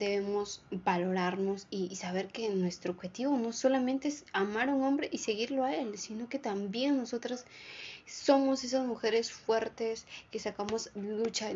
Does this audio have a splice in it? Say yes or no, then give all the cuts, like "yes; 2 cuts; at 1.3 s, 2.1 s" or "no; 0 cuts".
no; 0 cuts